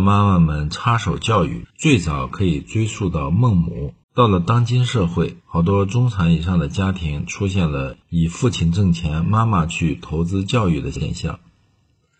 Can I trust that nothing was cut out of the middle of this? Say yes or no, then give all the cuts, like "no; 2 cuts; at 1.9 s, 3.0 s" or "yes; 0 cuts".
no; 4 cuts; at 1.7 s, 4.0 s, 5.4 s, 8.0 s